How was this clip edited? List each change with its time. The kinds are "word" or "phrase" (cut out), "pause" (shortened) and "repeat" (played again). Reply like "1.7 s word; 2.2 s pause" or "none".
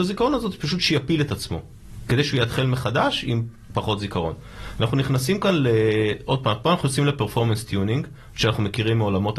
none